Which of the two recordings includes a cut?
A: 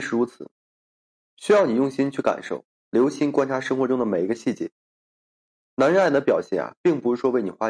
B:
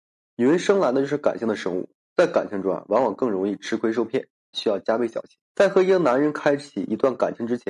B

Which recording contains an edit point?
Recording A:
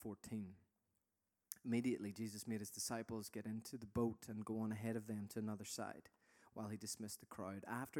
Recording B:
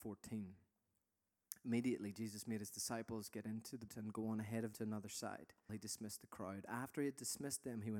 B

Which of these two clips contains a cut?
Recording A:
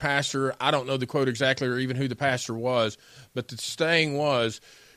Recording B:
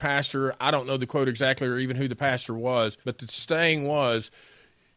B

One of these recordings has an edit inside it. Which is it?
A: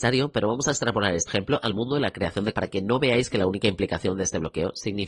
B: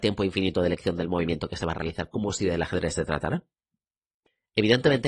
A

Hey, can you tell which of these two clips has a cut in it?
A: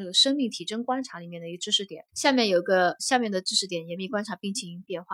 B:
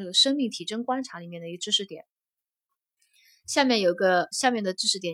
A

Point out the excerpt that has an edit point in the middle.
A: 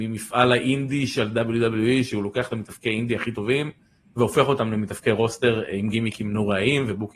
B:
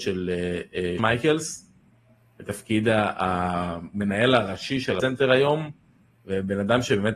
B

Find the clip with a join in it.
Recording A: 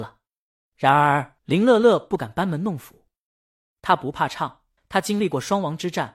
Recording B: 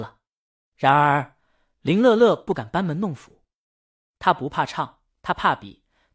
A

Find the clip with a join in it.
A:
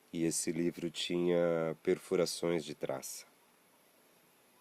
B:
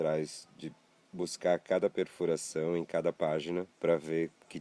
B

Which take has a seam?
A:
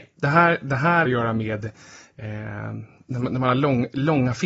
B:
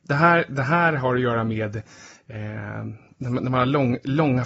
A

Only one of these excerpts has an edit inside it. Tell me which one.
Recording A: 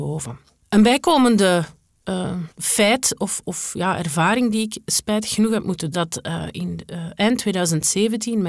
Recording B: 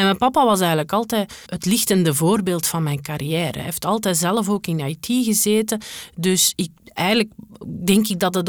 A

